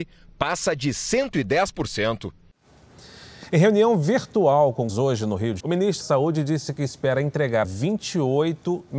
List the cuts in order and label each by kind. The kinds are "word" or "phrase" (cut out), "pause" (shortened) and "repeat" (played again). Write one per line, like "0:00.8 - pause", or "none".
0:04.9 - word
0:05.6 - word
0:06.0 - word
0:07.6 - word